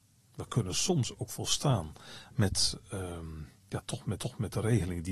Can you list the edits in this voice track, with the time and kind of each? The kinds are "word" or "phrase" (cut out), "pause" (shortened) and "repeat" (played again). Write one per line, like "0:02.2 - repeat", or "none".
0:03.6 - pause
0:04.2 - repeat